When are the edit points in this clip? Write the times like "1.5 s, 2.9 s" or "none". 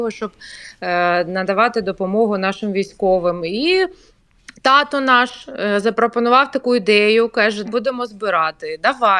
7.6 s